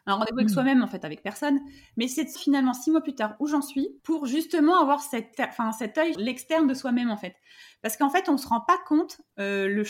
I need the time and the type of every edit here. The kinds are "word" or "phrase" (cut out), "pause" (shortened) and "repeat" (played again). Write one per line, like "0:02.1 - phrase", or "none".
0:02.4 - word
0:04.0 - pause
0:05.3 - word
0:06.1 - word